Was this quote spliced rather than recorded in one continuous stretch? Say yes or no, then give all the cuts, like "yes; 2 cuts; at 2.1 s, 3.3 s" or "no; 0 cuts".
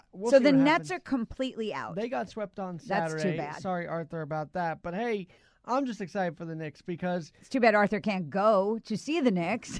no; 0 cuts